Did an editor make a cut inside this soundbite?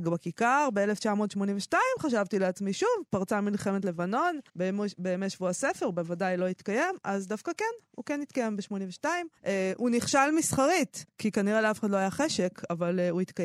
yes; 3 cuts; at 4.5 s, 9.4 s, 11.1 s

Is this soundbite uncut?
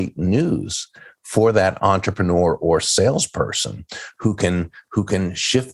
yes; 0 cuts

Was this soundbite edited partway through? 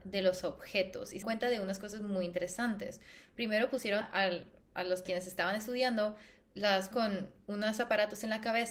yes; 4 cuts; at 1.2 s, 4.0 s, 5.1 s, 6.9 s

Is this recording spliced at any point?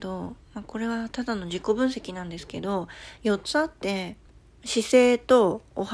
no; 0 cuts

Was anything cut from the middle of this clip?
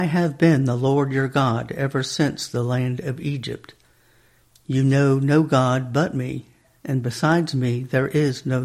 no; 0 cuts

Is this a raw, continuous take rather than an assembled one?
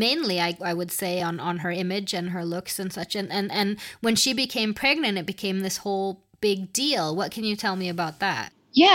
yes; 0 cuts

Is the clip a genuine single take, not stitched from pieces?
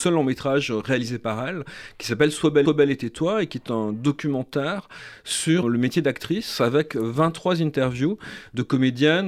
no; 2 cuts; at 2.7 s, 5.6 s

